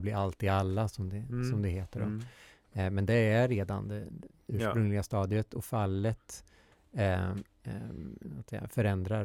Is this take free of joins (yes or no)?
yes